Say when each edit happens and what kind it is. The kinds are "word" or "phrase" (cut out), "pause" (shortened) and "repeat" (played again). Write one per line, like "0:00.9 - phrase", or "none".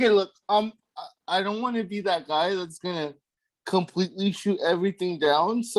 0:02.8 - word